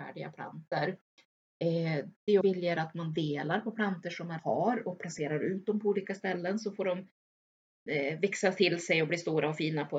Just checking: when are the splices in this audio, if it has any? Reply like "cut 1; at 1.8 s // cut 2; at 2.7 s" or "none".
cut 1; at 2.4 s // cut 2; at 4.4 s